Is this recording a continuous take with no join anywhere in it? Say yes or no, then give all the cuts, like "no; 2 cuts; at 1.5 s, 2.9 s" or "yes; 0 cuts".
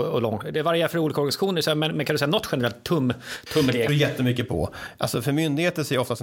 no; 1 cut; at 3.9 s